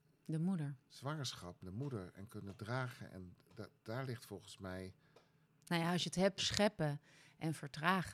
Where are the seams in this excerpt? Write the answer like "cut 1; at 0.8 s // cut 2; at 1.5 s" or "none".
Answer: cut 1; at 1.6 s // cut 2; at 3.8 s // cut 3; at 5.4 s // cut 4; at 6.4 s